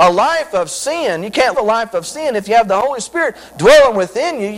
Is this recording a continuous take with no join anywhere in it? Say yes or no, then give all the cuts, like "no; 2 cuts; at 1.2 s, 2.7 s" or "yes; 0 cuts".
no; 1 cut; at 1.5 s